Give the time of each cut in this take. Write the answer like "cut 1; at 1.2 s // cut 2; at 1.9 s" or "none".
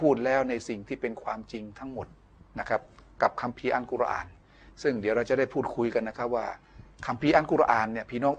none